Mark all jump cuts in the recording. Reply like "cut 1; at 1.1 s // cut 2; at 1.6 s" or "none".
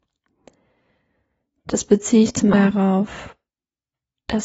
cut 1; at 2.5 s

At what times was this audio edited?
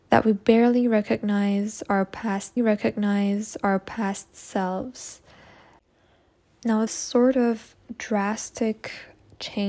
cut 1; at 2.6 s // cut 2; at 6.9 s

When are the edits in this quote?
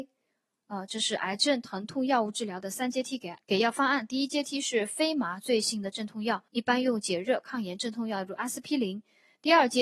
cut 1; at 3.4 s // cut 2; at 6.5 s

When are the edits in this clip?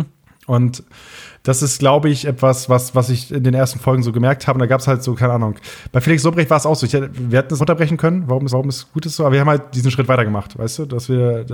cut 1; at 7.6 s // cut 2; at 8.5 s

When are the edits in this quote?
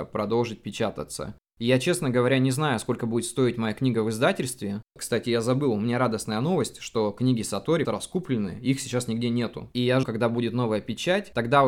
cut 1; at 7.8 s // cut 2; at 10.0 s

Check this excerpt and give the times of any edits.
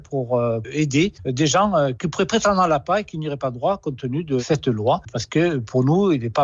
none

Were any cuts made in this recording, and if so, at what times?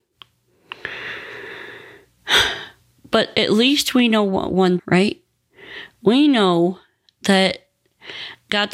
cut 1; at 4.8 s

